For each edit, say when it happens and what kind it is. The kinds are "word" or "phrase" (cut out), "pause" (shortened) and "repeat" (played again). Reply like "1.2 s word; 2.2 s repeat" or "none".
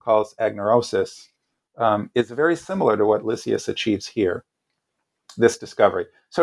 none